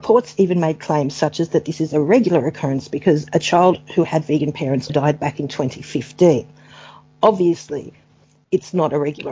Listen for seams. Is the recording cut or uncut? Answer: cut